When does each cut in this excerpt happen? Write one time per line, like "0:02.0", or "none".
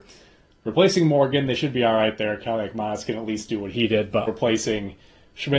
0:04.3